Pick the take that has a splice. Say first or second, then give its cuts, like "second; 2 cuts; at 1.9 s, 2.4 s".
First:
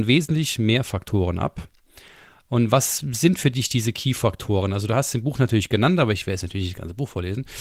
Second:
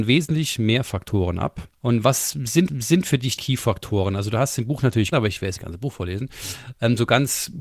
second; 5 cuts; at 1.7 s, 2.7 s, 3.4 s, 5.1 s, 5.6 s